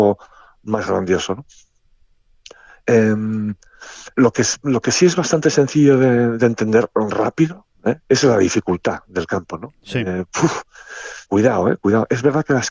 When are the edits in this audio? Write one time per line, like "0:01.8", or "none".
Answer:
0:04.1
0:08.0
0:11.3